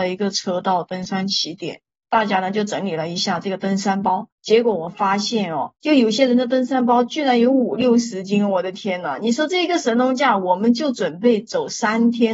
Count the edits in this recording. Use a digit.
2